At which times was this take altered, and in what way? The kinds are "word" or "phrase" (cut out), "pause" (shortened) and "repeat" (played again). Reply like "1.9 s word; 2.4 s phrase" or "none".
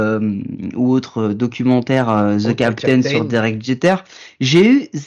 none